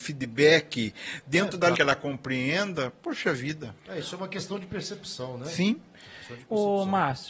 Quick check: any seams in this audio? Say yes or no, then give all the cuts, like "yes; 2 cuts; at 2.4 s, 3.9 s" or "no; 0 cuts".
yes; 1 cut; at 1.7 s